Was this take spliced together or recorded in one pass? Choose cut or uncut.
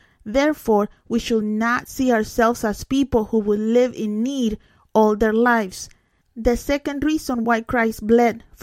uncut